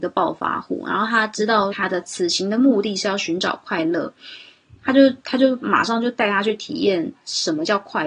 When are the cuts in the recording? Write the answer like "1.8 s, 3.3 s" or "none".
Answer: 1.7 s